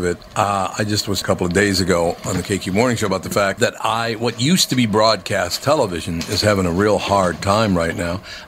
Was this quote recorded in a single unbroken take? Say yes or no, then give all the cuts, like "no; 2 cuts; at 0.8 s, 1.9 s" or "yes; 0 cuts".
no; 2 cuts; at 1.2 s, 3.6 s